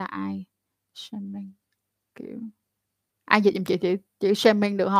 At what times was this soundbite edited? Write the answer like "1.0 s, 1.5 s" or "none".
none